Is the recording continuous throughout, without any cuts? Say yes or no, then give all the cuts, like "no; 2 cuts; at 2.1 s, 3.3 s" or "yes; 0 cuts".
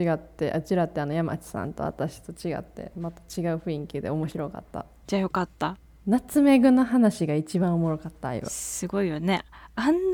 yes; 0 cuts